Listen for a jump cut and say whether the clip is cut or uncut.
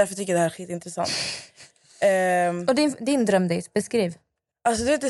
uncut